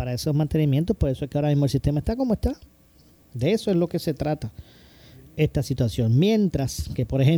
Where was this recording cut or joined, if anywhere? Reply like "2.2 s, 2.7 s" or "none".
none